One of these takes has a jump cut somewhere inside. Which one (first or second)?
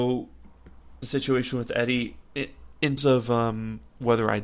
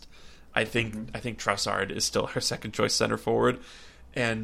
first